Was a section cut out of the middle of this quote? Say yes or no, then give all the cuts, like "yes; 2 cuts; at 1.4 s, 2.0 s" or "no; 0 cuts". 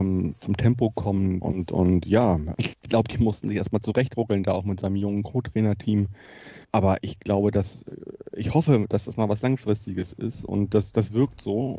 yes; 3 cuts; at 1.4 s, 2.5 s, 6.6 s